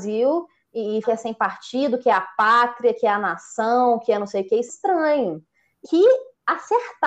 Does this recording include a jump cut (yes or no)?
yes